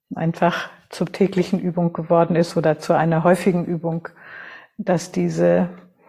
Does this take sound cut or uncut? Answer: uncut